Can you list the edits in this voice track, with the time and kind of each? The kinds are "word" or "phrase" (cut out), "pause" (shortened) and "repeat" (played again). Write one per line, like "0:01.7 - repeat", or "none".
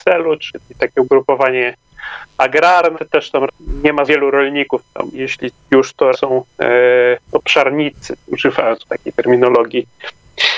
0:02.9 - word
0:03.5 - word
0:04.1 - word
0:05.1 - word
0:05.6 - word
0:06.1 - word
0:08.2 - word
0:08.8 - word

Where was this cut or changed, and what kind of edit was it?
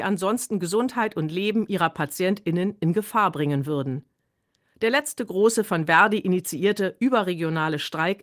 none

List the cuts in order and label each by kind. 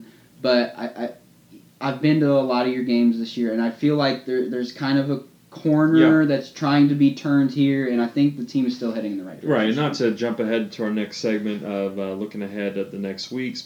none

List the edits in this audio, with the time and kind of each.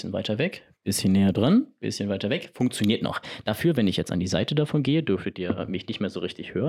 none

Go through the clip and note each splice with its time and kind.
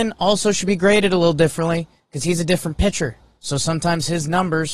none

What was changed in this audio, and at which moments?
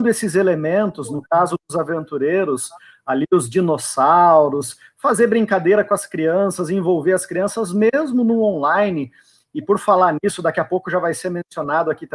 none

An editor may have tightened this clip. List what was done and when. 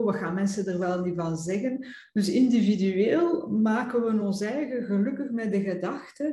none

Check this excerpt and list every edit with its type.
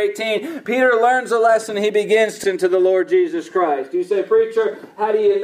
0:02.4 - word

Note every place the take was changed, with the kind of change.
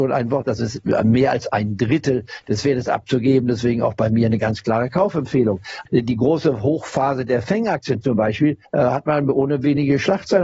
0:08.6 - pause

